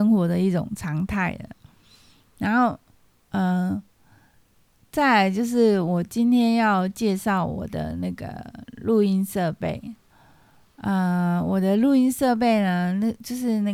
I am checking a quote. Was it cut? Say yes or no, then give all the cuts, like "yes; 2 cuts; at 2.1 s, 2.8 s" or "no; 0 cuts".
no; 0 cuts